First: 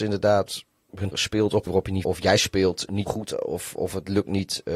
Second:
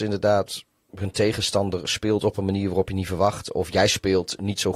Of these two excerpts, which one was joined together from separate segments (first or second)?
first